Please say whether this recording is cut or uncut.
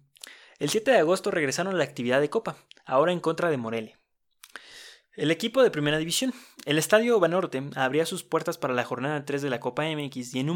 uncut